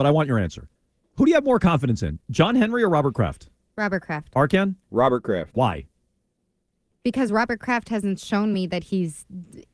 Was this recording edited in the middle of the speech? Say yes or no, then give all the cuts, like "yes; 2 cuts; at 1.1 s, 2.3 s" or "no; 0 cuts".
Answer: no; 0 cuts